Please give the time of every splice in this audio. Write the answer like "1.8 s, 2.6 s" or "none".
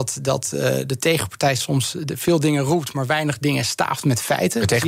none